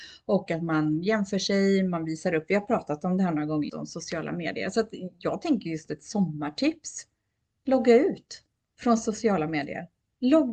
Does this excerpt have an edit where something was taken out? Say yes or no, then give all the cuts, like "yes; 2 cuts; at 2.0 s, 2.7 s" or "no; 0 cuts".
yes; 1 cut; at 3.7 s